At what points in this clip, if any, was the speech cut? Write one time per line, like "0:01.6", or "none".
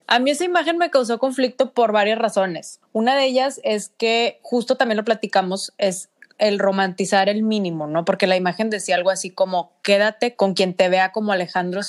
none